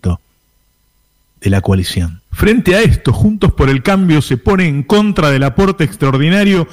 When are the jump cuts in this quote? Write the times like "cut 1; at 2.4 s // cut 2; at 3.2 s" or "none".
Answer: cut 1; at 2.3 s